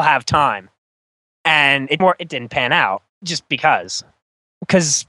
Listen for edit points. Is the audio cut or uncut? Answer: cut